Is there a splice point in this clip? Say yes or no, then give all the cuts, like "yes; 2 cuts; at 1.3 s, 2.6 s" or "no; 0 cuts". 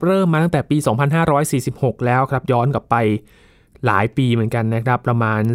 no; 0 cuts